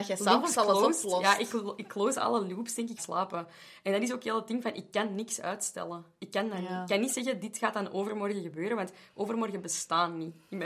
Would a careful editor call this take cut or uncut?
cut